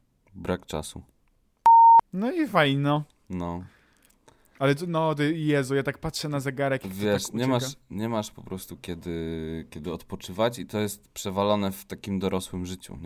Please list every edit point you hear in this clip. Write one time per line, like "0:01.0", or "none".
0:02.1